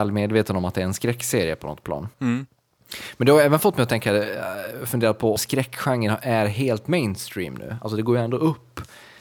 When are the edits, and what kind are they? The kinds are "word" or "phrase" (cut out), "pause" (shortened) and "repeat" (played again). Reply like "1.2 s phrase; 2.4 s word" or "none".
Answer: 2.1 s pause; 5.4 s word